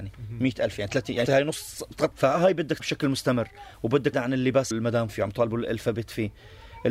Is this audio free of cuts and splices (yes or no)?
no